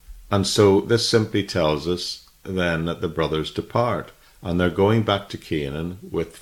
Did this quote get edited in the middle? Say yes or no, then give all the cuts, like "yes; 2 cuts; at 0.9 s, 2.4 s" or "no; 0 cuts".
no; 0 cuts